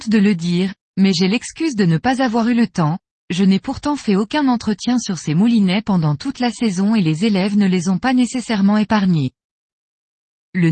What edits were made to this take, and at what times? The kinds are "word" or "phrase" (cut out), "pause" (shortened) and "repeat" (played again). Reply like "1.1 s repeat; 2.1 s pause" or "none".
none

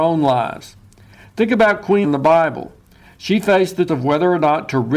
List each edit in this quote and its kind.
2.0 s word; 3.9 s word

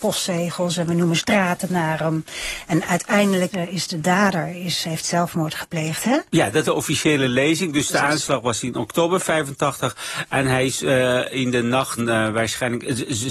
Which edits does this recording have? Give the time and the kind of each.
3.5 s word; 6.6 s word; 12.0 s word

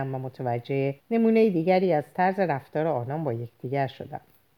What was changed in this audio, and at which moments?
1.0 s pause

